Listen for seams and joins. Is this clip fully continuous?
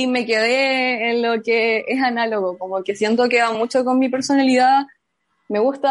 yes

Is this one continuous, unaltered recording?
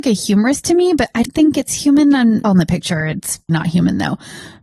no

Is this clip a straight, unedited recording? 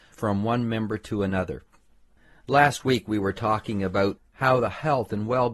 yes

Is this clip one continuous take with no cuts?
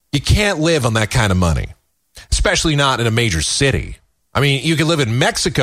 yes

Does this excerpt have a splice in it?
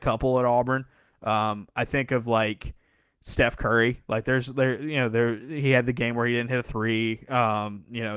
no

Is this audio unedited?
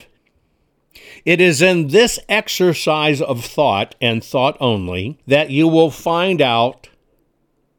no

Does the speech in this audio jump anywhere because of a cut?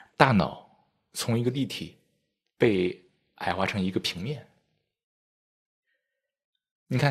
no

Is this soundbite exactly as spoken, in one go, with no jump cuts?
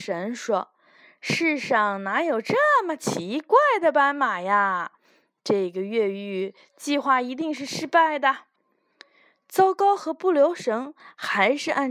no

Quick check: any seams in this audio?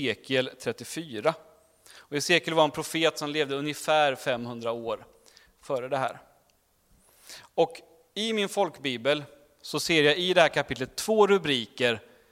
no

